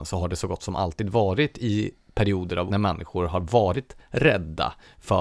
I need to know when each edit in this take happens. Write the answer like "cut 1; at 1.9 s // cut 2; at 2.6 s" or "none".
cut 1; at 2.7 s